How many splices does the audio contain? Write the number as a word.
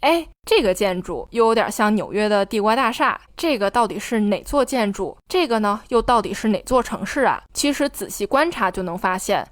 one